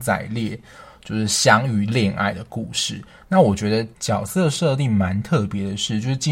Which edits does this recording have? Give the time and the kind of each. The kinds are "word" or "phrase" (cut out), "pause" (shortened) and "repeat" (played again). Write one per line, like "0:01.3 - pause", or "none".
0:03.9 - pause